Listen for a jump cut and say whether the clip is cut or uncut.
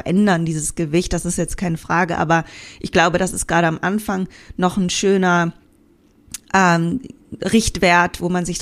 uncut